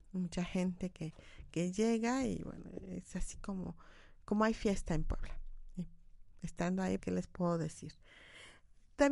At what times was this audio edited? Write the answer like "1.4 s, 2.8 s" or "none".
7.0 s